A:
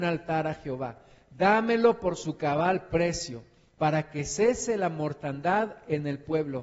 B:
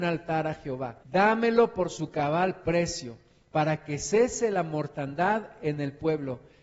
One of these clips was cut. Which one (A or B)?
B